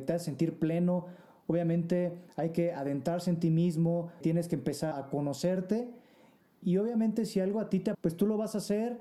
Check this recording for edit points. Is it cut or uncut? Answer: cut